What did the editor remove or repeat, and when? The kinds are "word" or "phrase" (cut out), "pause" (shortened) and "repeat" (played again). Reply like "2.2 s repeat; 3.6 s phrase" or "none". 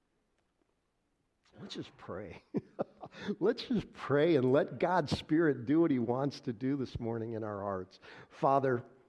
none